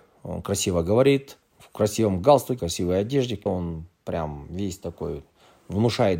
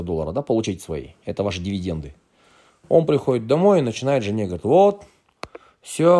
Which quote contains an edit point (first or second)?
first